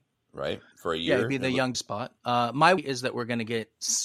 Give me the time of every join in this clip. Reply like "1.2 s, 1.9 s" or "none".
1.7 s, 2.8 s